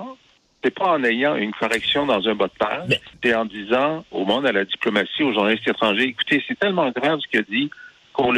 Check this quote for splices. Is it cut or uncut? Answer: cut